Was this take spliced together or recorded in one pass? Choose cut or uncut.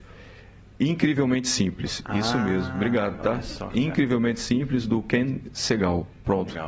uncut